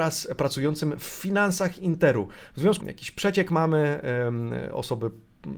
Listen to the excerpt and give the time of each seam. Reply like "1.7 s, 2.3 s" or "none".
2.8 s